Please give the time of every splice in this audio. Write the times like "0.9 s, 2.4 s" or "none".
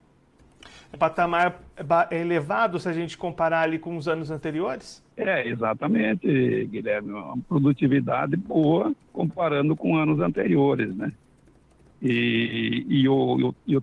0.9 s, 5.1 s, 9.0 s

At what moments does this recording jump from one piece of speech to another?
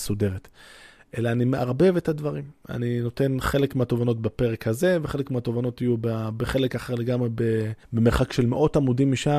7.8 s

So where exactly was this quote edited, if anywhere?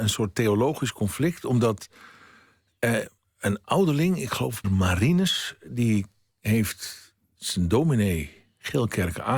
3.2 s, 4.6 s, 6.3 s

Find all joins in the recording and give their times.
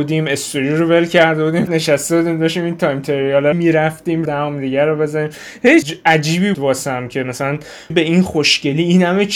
1.7 s, 3.5 s, 4.3 s, 5.8 s, 6.5 s, 7.9 s

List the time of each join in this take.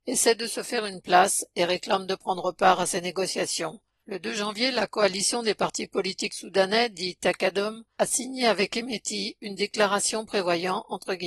none

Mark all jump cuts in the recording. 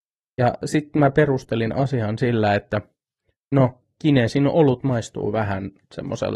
none

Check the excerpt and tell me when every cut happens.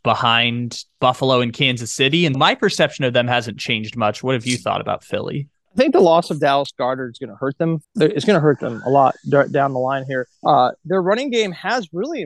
2.3 s, 5.5 s, 7.8 s, 10.4 s

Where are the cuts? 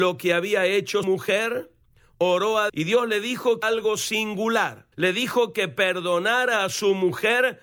1.0 s, 2.7 s, 3.6 s, 4.9 s

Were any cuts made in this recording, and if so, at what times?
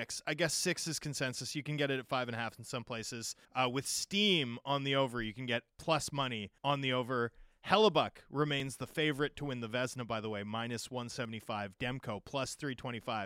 3.4 s, 5.7 s, 6.6 s

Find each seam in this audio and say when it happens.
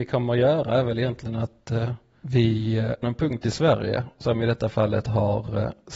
3.0 s

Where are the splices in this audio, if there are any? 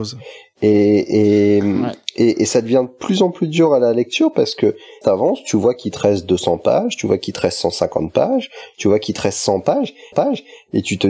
5.0 s, 10.1 s

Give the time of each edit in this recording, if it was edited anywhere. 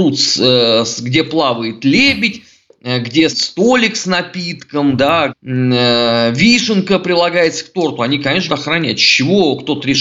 3.3 s, 5.3 s, 8.5 s

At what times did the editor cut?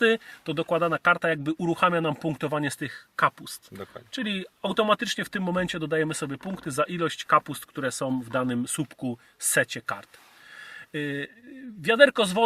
none

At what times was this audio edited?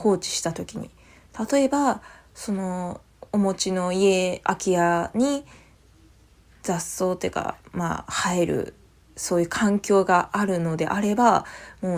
none

